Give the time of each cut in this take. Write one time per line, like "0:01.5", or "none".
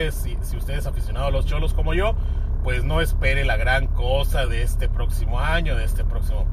none